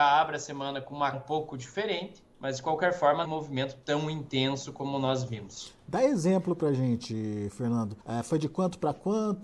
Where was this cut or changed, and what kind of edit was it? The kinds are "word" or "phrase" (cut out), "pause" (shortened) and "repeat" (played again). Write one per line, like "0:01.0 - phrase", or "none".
0:01.1 - word
0:02.3 - pause
0:03.2 - phrase
0:08.0 - pause